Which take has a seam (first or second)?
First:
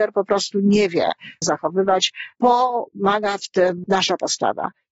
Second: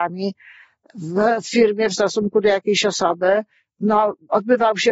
first